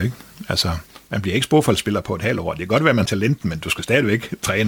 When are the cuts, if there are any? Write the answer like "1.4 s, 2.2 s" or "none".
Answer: 3.0 s